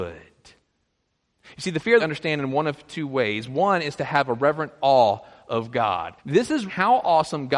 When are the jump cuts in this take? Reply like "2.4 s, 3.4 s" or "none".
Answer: 2.0 s, 6.2 s, 6.7 s